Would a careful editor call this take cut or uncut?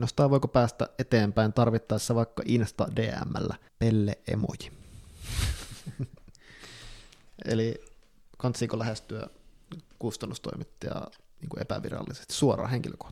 cut